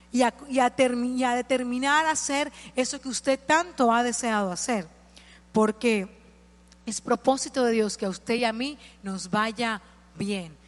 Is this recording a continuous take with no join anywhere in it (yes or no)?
yes